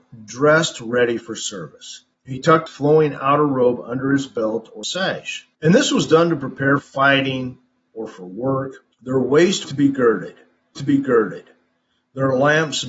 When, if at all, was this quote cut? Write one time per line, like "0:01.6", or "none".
0:02.1
0:02.7
0:04.8
0:05.5
0:06.8
0:08.9
0:09.6
0:10.8